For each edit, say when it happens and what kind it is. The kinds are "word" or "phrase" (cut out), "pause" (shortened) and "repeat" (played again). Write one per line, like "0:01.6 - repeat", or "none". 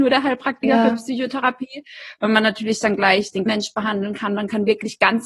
0:03.5 - word